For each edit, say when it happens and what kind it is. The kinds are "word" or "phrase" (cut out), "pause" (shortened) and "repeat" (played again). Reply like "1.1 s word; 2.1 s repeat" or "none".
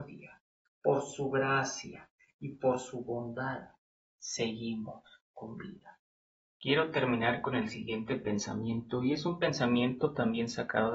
none